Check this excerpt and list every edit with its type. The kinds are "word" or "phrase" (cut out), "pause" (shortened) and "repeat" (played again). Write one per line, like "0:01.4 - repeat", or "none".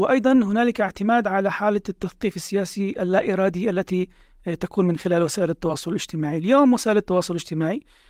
none